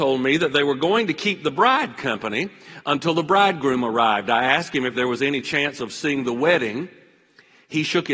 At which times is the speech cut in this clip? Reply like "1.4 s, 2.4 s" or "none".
none